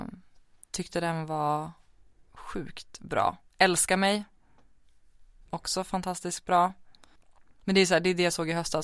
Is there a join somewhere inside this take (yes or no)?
no